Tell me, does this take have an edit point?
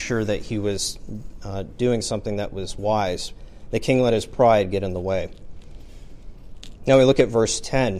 no; 0 cuts

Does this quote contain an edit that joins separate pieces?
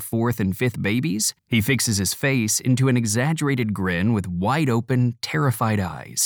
yes; 1 cut; at 1.4 s

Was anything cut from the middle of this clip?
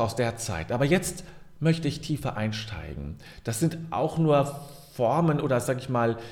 no; 0 cuts

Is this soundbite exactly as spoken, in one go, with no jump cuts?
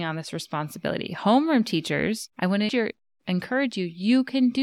no; 2 cuts; at 2.3 s, 2.7 s

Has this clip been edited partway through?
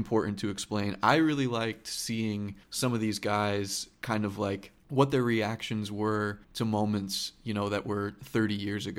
yes; 3 cuts; at 2.6 s, 4.8 s, 6.4 s

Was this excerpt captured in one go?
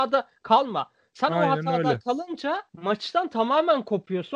no; 1 cut; at 2.7 s

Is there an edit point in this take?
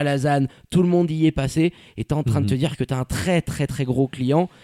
yes; 1 cut; at 3.7 s

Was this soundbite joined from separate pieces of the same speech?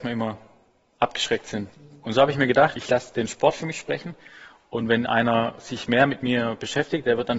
no; 0 cuts

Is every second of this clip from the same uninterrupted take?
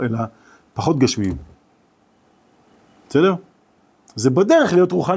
yes; 0 cuts

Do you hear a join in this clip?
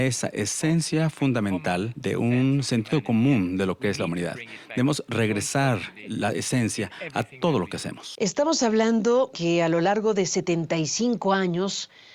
yes; 1 cut; at 9.3 s

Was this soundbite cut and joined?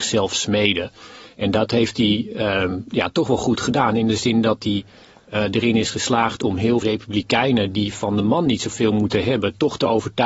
yes; 1 cut; at 6.8 s

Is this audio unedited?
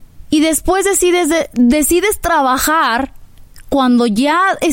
yes; 0 cuts

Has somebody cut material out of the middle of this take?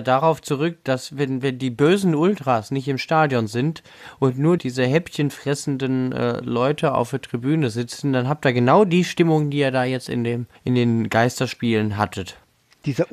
yes; 2 cuts; at 4.6 s, 10.5 s

